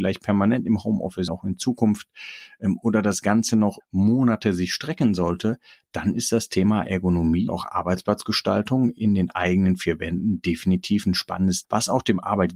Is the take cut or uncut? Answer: cut